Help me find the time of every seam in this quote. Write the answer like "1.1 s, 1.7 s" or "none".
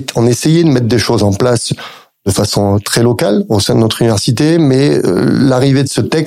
none